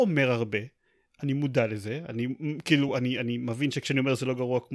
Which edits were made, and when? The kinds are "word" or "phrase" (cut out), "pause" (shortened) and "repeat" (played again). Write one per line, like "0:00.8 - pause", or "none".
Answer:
none